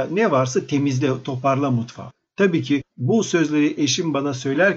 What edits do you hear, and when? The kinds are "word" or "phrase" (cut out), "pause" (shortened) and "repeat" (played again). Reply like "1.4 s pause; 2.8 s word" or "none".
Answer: none